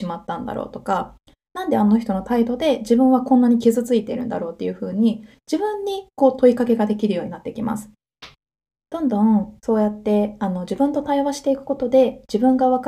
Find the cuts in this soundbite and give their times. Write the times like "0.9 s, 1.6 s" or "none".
none

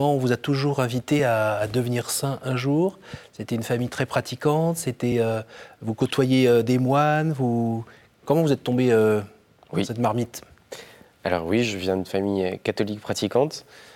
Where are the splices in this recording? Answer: none

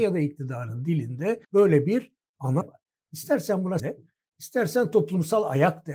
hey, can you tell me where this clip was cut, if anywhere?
1.4 s, 2.6 s, 3.8 s

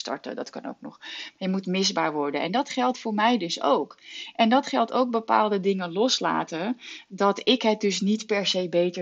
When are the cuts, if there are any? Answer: none

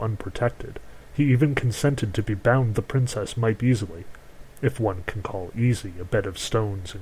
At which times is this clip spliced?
1.0 s, 2.7 s, 3.6 s

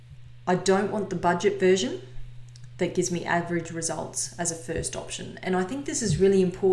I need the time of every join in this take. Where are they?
none

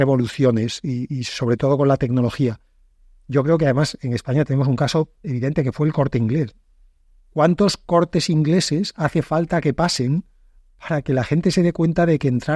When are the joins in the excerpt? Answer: none

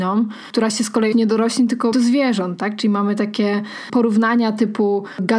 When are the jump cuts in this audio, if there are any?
1.1 s, 1.9 s

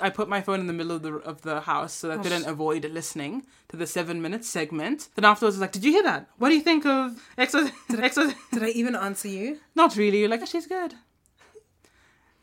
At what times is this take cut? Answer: 2.2 s, 5.1 s, 7.1 s, 8.0 s, 10.4 s

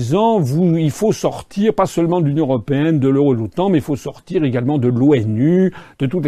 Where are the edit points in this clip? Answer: none

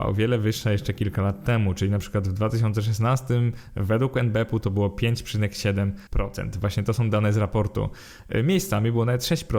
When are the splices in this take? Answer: 6.1 s

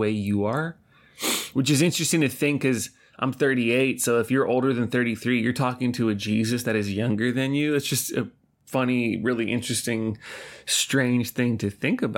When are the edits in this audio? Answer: none

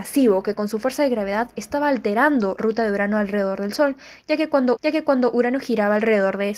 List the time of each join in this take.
2.6 s, 4.8 s

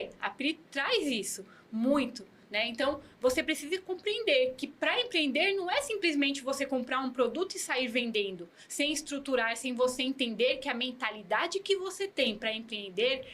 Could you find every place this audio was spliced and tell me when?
none

